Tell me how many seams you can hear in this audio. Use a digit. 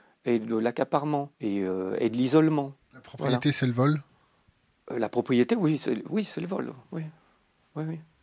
2